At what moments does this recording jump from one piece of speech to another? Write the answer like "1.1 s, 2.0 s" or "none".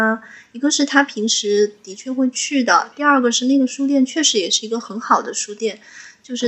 none